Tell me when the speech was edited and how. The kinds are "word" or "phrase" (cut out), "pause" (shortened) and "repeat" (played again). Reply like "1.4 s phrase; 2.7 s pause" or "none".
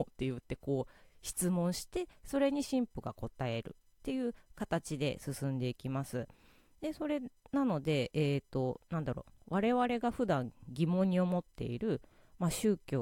none